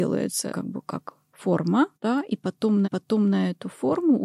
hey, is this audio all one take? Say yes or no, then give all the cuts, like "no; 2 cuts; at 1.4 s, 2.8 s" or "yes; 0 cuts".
no; 3 cuts; at 1.3 s, 1.9 s, 2.8 s